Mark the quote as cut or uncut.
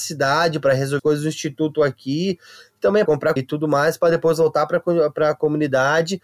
cut